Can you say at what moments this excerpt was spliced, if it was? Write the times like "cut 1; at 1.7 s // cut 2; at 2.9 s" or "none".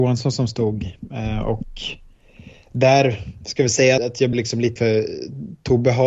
cut 1; at 3.4 s // cut 2; at 4.0 s // cut 3; at 4.3 s // cut 4; at 4.8 s